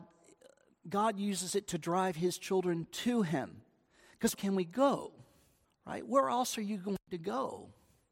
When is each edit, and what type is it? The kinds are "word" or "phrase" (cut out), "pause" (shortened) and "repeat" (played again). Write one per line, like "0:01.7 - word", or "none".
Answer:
0:04.3 - phrase
0:05.6 - pause